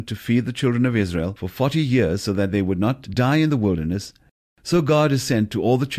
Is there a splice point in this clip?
no; 0 cuts

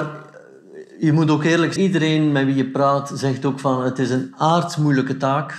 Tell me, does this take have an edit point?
yes; 1 cut; at 1.8 s

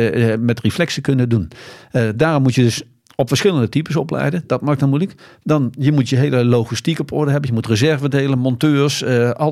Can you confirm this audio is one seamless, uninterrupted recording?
yes; 0 cuts

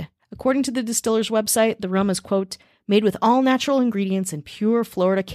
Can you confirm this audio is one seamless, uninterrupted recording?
yes; 0 cuts

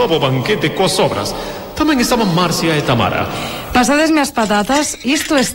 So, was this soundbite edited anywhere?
no; 0 cuts

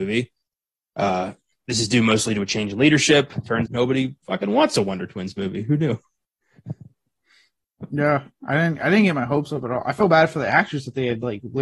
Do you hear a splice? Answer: yes; 3 cuts; at 1.5 s, 3.7 s, 4.2 s

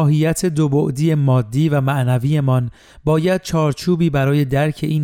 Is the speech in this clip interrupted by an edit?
no; 0 cuts

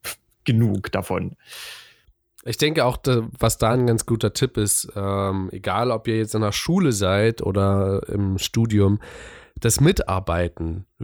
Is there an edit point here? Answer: no; 0 cuts

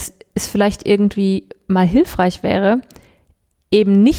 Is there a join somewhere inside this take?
no; 0 cuts

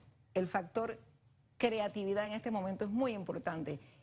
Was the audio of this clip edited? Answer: no; 0 cuts

